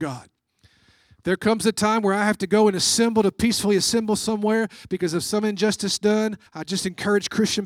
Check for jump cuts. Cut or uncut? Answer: cut